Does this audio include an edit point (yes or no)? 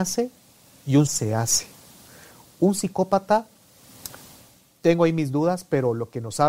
yes